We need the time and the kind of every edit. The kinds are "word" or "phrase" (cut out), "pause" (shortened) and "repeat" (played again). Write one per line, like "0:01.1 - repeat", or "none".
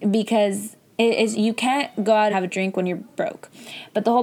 0:01.3 - word
0:02.3 - word